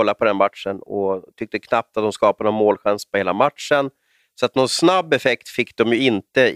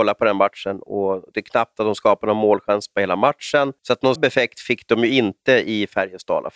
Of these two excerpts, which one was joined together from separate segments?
second; 3 cuts; at 1.3 s, 3.8 s, 4.2 s

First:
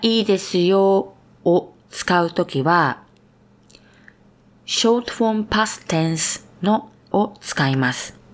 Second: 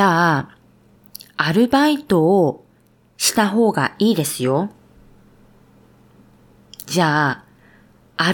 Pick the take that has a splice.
first; 1 cut; at 7.1 s

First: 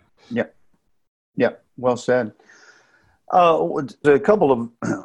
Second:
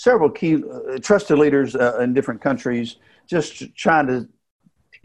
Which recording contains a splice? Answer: first; 1 cut; at 4.0 s

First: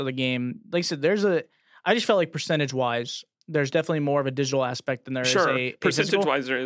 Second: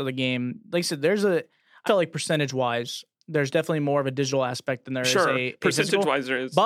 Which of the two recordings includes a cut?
second; 1 cut; at 1.9 s

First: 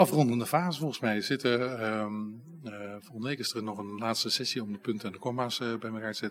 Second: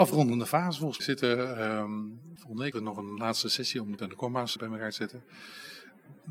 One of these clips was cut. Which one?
second; 5 cuts; at 1.0 s, 2.4 s, 2.7 s, 4.0 s, 4.6 s

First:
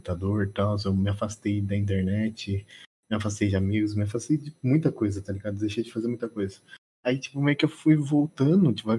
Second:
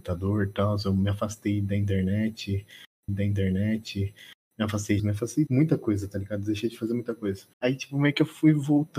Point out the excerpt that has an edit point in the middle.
second; 4 cuts; at 3.1 s, 5.0 s, 5.5 s, 7.5 s

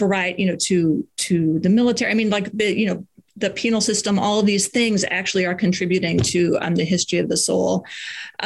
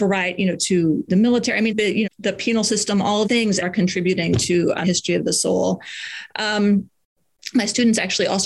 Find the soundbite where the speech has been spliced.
second; 6 cuts; at 1.1 s, 1.7 s, 2.0 s, 3.2 s, 3.6 s, 4.8 s

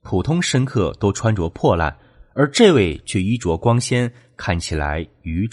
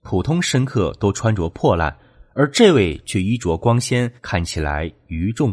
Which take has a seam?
second; 1 cut; at 4.2 s

